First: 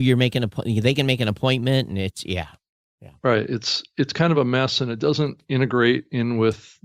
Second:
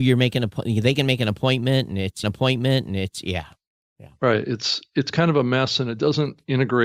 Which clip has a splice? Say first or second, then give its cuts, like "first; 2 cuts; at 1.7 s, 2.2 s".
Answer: second; 1 cut; at 2.2 s